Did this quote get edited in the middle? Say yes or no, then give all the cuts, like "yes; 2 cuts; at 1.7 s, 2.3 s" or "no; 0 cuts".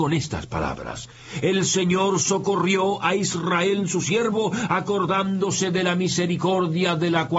no; 0 cuts